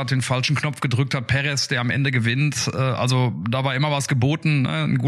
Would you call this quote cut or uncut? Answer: uncut